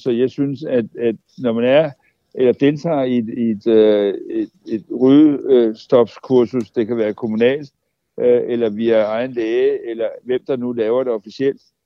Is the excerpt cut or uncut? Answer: uncut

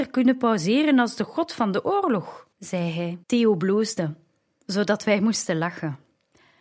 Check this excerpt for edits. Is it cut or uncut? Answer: cut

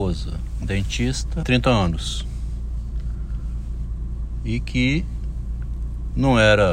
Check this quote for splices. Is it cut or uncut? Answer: cut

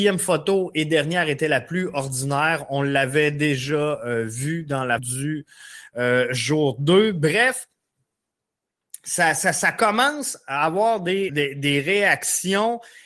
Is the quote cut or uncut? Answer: cut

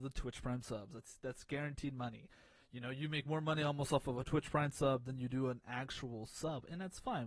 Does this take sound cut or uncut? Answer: uncut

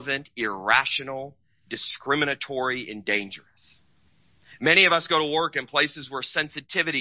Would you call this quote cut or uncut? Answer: uncut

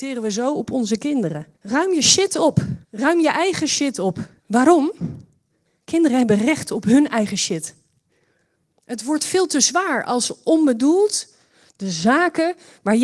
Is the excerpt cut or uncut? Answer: cut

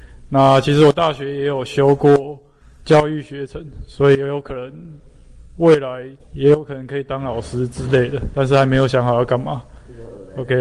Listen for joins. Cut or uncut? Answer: cut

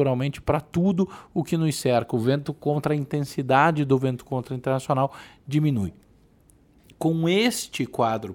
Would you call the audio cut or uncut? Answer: uncut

